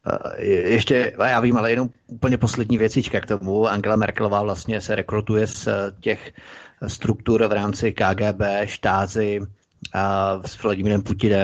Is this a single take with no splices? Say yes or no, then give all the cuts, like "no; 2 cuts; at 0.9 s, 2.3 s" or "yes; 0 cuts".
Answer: yes; 0 cuts